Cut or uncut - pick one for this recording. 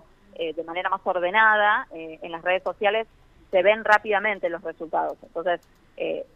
uncut